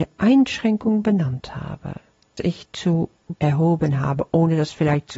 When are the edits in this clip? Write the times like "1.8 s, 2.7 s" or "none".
2.4 s, 3.4 s